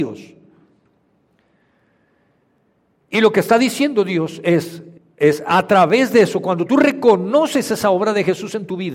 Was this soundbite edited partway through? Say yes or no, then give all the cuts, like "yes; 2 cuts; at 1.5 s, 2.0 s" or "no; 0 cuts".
yes; 1 cut; at 5.0 s